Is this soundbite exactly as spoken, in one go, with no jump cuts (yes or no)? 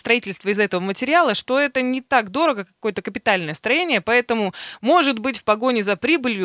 yes